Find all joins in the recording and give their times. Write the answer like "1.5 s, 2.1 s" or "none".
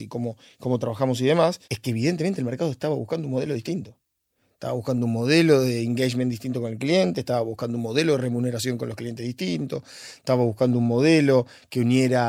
1.6 s